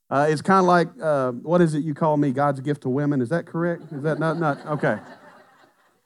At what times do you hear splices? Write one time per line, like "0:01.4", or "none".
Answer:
none

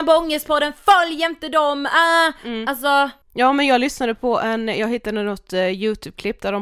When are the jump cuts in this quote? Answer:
0:03.2

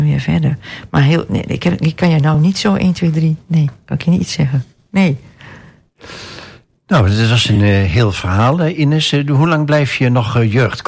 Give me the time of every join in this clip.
none

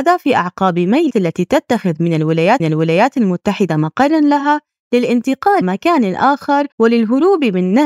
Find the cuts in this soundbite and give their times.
0:01.1
0:02.6
0:05.6
0:06.7

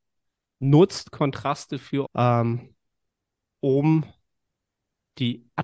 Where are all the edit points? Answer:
0:02.0

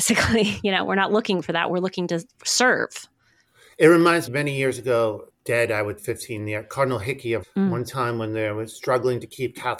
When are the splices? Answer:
0:04.3
0:05.3
0:06.0
0:07.4

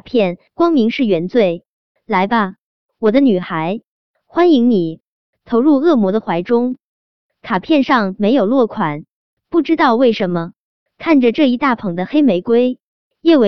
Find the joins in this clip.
none

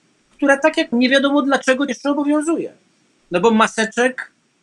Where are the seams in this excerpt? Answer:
0:00.9
0:01.9

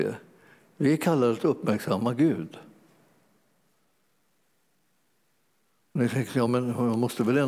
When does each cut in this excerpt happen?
none

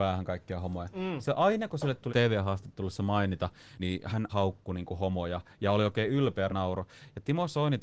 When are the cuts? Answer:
0:02.1
0:03.8
0:04.3
0:06.5

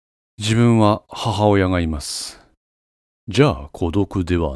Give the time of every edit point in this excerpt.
none

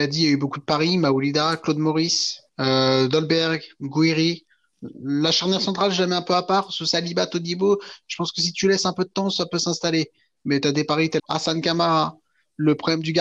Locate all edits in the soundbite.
0:02.5
0:11.2

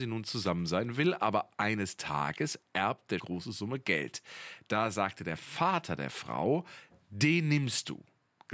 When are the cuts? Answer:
0:03.2

